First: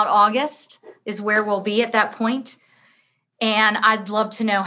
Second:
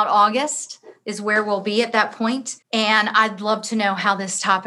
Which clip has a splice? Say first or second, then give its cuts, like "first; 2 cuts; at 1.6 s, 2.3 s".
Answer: second; 1 cut; at 2.6 s